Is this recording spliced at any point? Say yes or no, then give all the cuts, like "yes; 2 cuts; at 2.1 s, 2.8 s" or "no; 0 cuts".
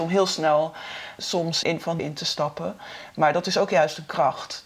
yes; 3 cuts; at 1.2 s, 1.6 s, 2.0 s